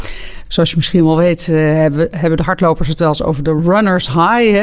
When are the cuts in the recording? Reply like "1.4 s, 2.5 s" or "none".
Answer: none